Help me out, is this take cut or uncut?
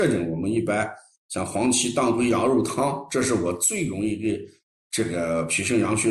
uncut